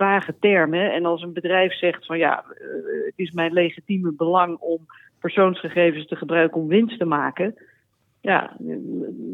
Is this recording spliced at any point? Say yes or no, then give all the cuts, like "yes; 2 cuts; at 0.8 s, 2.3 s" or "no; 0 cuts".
no; 0 cuts